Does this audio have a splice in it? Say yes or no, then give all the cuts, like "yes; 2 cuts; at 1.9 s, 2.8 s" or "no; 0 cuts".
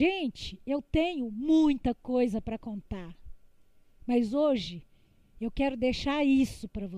no; 0 cuts